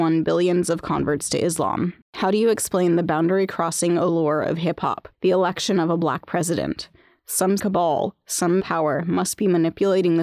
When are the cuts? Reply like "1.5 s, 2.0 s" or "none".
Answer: 2.0 s, 5.1 s, 7.6 s, 8.6 s

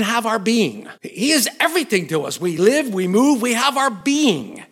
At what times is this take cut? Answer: 1.0 s

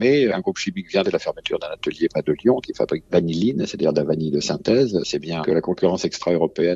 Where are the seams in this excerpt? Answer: 1.0 s, 2.6 s, 3.1 s, 5.4 s

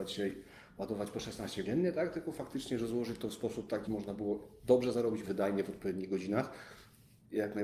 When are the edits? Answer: 1.6 s, 3.9 s, 5.2 s

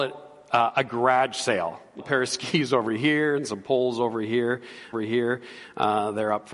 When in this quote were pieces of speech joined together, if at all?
2.0 s, 4.9 s

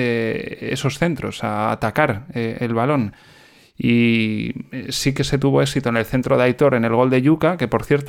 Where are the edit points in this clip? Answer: none

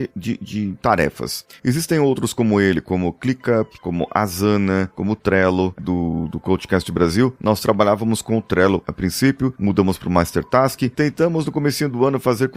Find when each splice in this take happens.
5.8 s

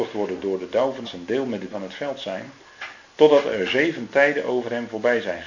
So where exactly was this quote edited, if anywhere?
1.0 s, 1.7 s

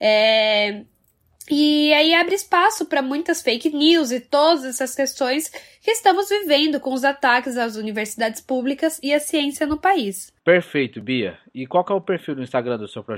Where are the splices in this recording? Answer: 10.4 s

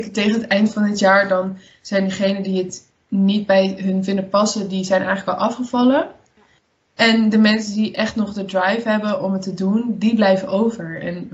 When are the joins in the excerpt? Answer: 6.3 s

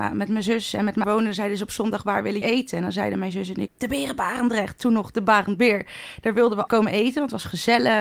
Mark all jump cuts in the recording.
1.0 s, 2.4 s, 3.7 s, 6.7 s

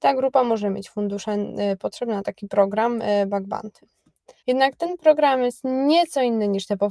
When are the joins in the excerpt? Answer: 4.4 s

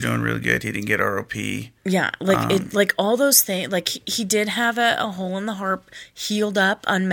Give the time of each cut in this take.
1.8 s

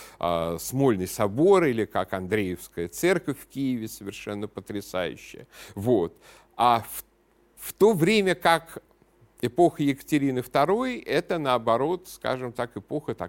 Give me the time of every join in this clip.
none

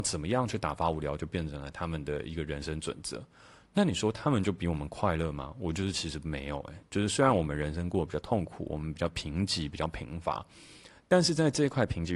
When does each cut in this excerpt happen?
none

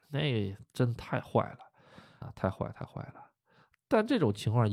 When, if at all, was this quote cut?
2.2 s

